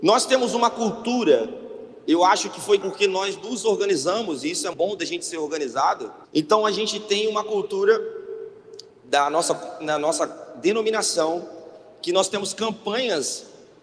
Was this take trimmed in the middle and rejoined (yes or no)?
yes